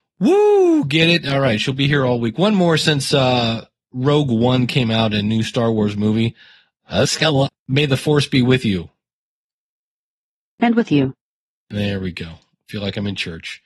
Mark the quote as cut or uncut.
uncut